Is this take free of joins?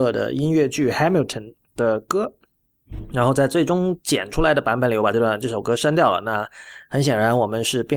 no; 1 cut; at 1.7 s

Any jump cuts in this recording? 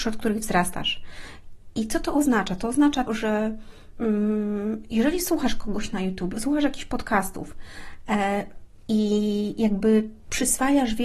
yes; 2 cuts; at 3.1 s, 6.3 s

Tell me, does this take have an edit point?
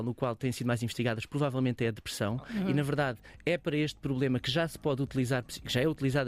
no; 0 cuts

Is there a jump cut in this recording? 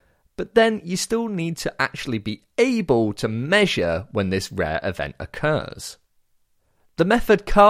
no; 0 cuts

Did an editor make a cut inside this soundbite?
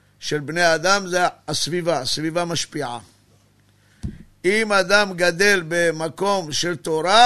no; 0 cuts

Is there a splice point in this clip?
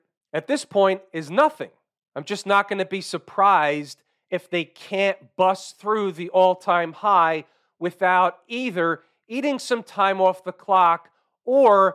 no; 0 cuts

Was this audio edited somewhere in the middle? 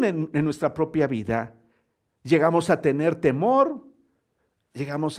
no; 0 cuts

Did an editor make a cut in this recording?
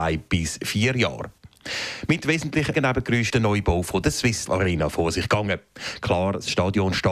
yes; 3 cuts; at 2.7 s, 3.3 s, 4.5 s

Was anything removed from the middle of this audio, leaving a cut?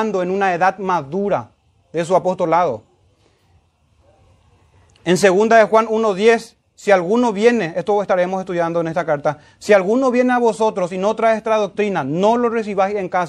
no; 0 cuts

